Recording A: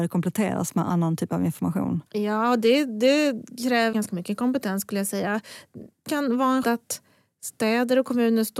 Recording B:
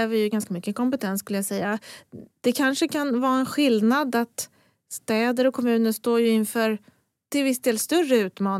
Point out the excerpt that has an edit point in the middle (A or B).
A